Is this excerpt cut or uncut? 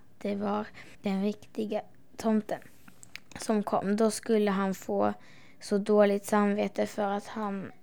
cut